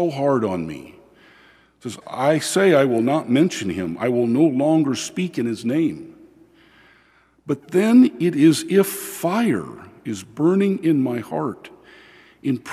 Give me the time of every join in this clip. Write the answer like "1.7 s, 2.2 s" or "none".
2.0 s